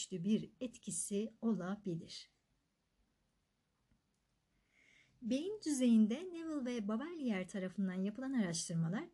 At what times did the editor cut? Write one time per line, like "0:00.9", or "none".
none